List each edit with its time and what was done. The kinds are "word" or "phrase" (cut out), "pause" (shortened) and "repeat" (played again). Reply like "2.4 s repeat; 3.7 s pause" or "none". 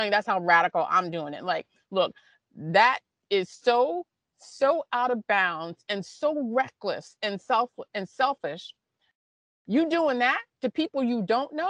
none

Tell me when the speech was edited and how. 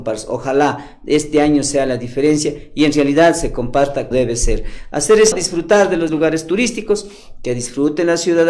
4.1 s word; 5.3 s word; 6.1 s word

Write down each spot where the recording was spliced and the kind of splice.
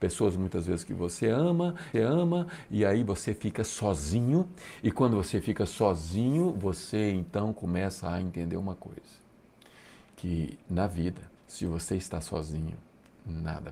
1.9 s repeat; 11.4 s pause

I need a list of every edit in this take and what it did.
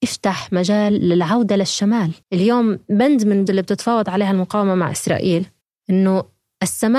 2.2 s pause; 3.5 s word; 5.6 s pause

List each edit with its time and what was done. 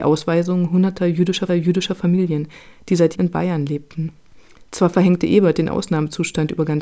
1.5 s repeat; 3.1 s word

